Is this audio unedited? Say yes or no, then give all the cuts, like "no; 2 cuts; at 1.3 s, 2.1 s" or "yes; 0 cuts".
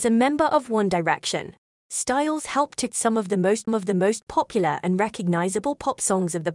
no; 2 cuts; at 2.9 s, 3.7 s